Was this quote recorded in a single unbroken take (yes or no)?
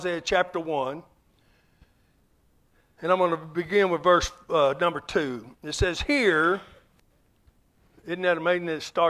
yes